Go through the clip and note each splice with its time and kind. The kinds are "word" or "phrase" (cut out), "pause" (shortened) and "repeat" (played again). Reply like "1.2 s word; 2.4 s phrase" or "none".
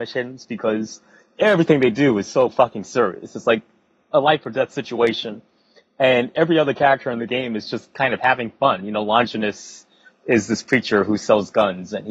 none